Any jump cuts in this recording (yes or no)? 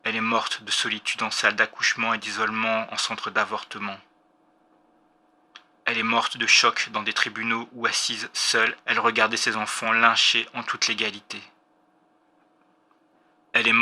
no